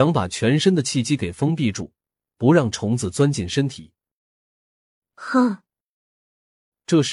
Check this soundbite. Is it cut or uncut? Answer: uncut